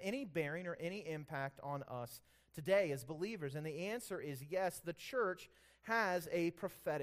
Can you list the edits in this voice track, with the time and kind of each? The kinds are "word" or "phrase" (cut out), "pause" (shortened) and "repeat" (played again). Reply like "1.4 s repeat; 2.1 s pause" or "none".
none